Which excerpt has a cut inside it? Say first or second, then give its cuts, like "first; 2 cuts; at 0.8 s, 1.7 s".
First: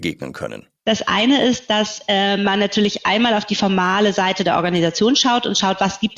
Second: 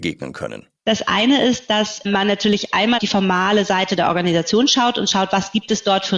second; 2 cuts; at 2.0 s, 3.0 s